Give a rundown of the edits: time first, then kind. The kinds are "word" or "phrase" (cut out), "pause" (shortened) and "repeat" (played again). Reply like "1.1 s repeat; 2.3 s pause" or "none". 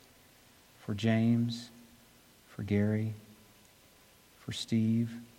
none